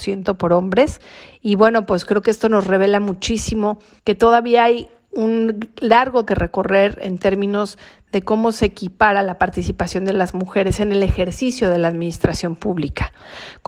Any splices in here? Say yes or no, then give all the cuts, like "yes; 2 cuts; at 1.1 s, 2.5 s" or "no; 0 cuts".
yes; 1 cut; at 6.3 s